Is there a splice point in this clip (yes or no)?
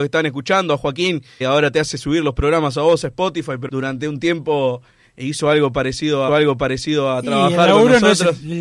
yes